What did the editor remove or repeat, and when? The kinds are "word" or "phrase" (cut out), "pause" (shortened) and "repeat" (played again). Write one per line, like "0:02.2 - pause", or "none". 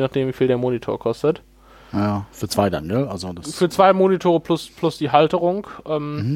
none